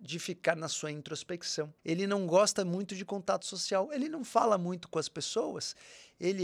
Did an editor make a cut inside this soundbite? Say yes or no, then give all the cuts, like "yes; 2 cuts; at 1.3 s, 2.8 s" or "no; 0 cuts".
yes; 1 cut; at 1.8 s